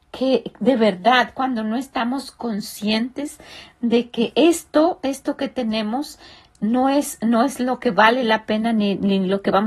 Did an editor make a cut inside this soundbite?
no; 0 cuts

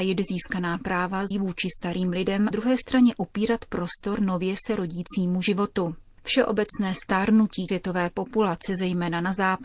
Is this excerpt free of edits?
no; 3 cuts; at 1.3 s, 2.5 s, 7.7 s

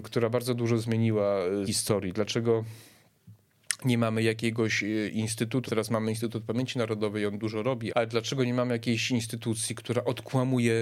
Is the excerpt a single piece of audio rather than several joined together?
no; 3 cuts; at 1.7 s, 5.7 s, 7.9 s

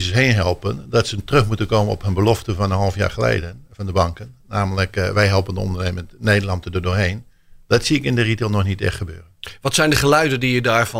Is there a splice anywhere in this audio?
no; 0 cuts

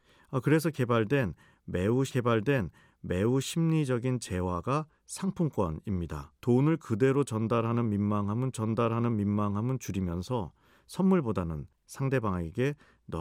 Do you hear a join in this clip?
yes; 3 cuts; at 2.1 s, 6.4 s, 8.5 s

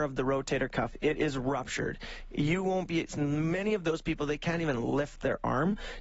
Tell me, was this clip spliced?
no; 0 cuts

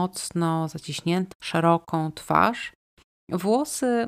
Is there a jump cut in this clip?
yes; 1 cut; at 1.3 s

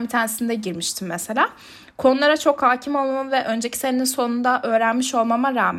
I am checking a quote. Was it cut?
no; 0 cuts

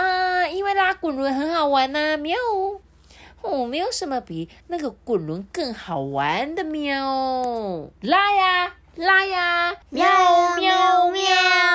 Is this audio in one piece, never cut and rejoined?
no; 3 cuts; at 4.6 s, 8.0 s, 9.8 s

